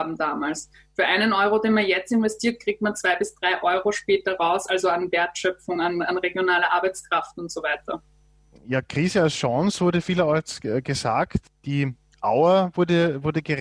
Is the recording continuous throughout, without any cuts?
yes; 0 cuts

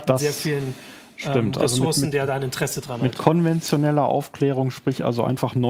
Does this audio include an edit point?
no; 0 cuts

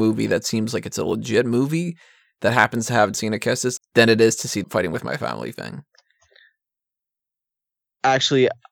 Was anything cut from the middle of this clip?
yes; 3 cuts; at 3.1 s, 3.8 s, 4.6 s

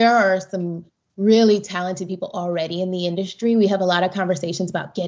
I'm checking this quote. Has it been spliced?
no; 0 cuts

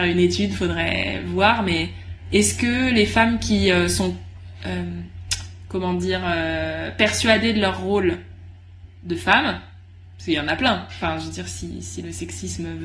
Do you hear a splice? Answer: no; 0 cuts

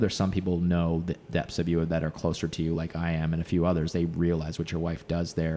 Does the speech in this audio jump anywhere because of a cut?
no; 0 cuts

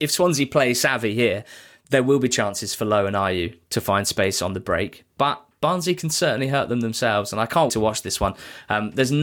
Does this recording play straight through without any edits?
no; 1 cut; at 7.7 s

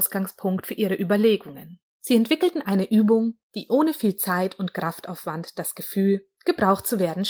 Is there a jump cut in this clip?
yes; 1 cut; at 1.9 s

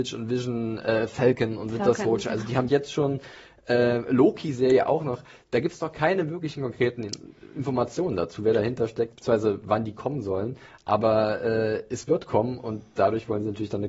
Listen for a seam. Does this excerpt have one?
yes; 1 cut; at 2.7 s

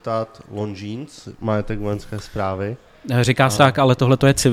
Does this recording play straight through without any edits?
no; 2 cuts; at 1.4 s, 3.6 s

